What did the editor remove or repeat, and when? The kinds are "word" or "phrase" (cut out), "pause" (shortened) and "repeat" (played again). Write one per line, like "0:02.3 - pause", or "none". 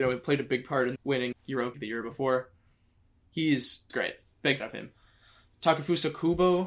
0:01.0 - word
0:01.3 - word
0:01.7 - word
0:03.9 - word
0:04.6 - word